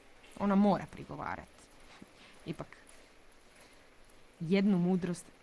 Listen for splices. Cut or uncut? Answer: uncut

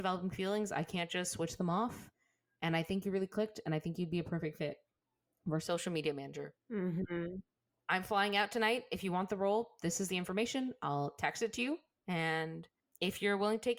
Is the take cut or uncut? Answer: uncut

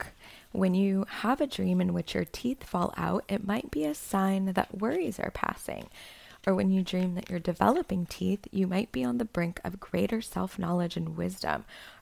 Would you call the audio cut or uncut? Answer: uncut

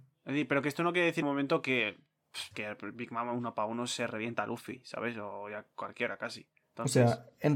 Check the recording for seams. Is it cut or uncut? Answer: cut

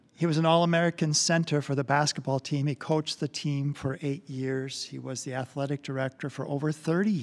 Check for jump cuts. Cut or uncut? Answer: uncut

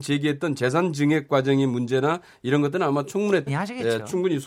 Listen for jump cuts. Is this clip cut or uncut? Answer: cut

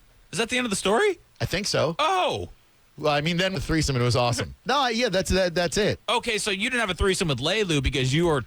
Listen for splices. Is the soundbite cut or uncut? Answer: cut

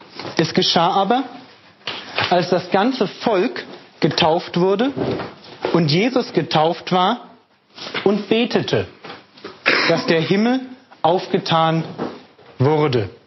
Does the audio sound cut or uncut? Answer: uncut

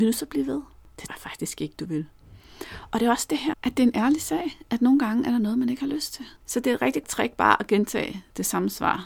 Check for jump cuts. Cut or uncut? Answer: cut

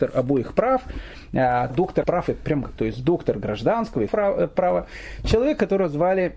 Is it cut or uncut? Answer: cut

